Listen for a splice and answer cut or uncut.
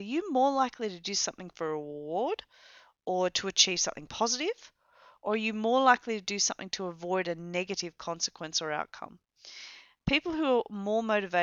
uncut